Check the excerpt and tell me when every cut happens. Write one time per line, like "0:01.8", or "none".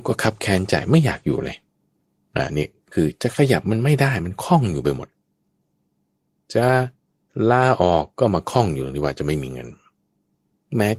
none

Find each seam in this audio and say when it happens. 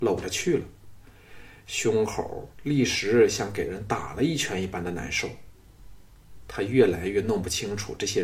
0:02.5

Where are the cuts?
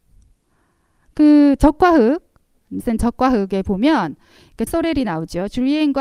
0:02.8
0:04.7

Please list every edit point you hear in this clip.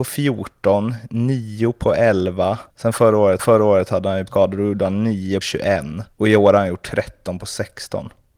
0:02.7
0:03.4
0:04.3
0:05.4
0:06.1

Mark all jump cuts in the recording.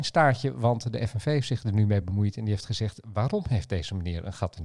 none

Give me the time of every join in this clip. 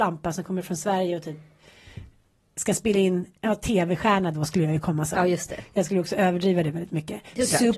none

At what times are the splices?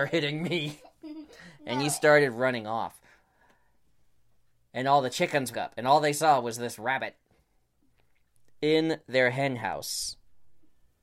0:05.5

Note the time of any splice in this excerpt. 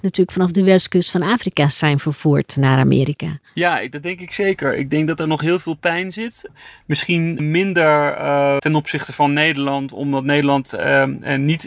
0:07.4
0:08.6

